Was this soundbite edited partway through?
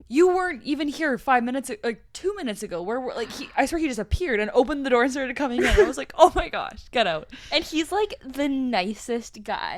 no; 0 cuts

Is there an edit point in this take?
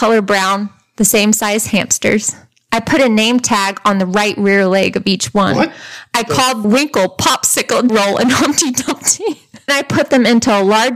yes; 3 cuts; at 6.6 s, 7.9 s, 9.7 s

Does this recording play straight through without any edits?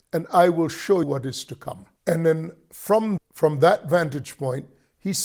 no; 3 cuts; at 1.0 s, 2.0 s, 3.2 s

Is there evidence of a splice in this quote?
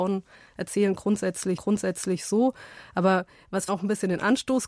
yes; 2 cuts; at 1.6 s, 3.7 s

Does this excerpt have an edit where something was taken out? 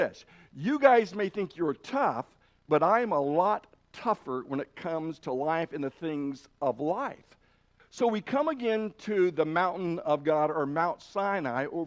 no; 0 cuts

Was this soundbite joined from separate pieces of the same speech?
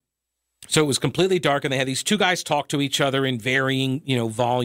no; 0 cuts

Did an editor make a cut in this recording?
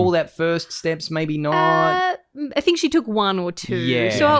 yes; 1 cut; at 2.5 s

